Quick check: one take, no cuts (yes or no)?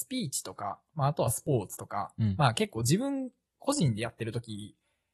yes